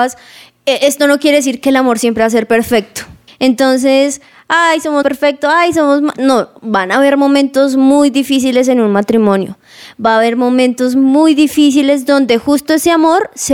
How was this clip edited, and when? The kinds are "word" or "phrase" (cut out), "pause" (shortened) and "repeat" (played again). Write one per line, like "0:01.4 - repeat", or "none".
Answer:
0:03.3 - pause
0:05.0 - phrase